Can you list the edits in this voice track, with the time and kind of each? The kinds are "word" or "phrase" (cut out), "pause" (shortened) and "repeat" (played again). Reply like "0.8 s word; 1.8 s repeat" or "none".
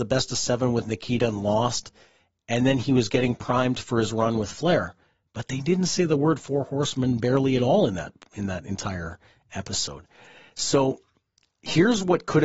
none